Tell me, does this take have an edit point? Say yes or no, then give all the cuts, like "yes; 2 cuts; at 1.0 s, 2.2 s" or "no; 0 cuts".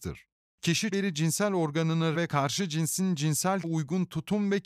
yes; 3 cuts; at 0.9 s, 2.1 s, 3.6 s